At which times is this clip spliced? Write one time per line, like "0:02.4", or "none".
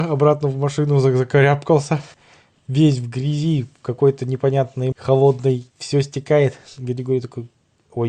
0:02.1
0:04.9
0:05.7